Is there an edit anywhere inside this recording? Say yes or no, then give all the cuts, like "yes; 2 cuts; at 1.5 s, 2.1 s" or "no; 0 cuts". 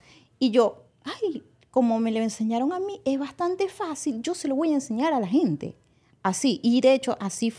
no; 0 cuts